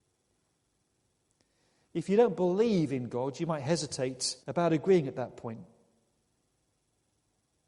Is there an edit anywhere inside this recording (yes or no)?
yes